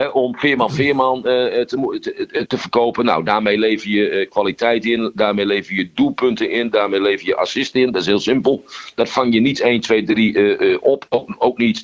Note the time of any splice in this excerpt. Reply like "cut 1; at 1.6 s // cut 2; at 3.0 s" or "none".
cut 1; at 2.5 s